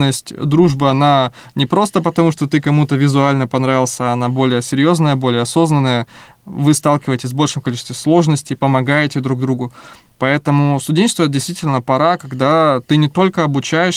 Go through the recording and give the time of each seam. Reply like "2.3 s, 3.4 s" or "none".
none